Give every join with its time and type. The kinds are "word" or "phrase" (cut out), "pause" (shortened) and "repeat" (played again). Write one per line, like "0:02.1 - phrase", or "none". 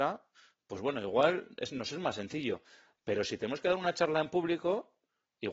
none